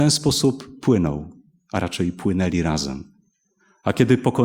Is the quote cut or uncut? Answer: uncut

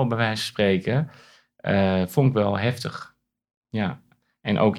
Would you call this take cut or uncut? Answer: uncut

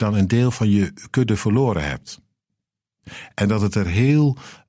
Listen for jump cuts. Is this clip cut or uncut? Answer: uncut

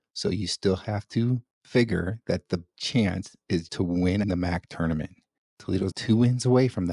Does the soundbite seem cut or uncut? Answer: cut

